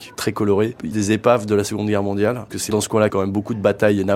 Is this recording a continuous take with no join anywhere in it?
no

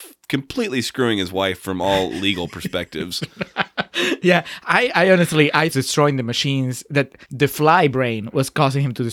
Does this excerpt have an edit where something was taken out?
yes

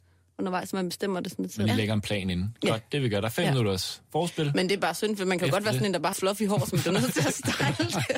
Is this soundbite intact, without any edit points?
no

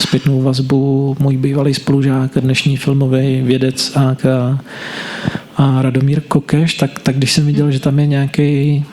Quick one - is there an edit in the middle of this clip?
yes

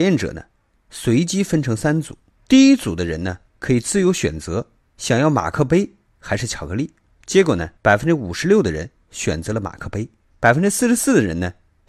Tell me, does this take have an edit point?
yes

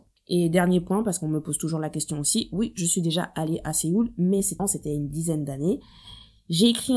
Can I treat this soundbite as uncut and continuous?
no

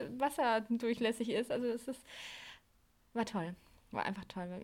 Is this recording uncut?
yes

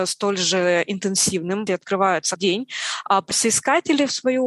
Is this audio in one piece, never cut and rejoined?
no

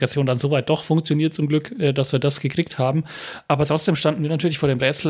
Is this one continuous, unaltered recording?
yes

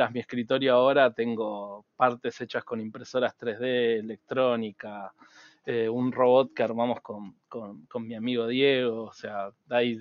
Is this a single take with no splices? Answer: yes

